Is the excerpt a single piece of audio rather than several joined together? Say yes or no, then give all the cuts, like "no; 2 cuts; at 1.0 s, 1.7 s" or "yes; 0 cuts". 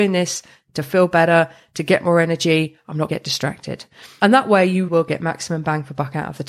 no; 2 cuts; at 3.1 s, 4.9 s